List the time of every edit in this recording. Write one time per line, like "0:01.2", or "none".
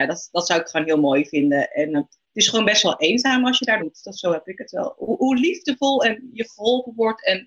0:01.9
0:03.8